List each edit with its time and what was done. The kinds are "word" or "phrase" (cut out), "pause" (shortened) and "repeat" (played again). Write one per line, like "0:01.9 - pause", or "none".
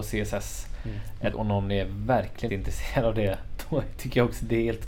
0:01.3 - word
0:02.5 - word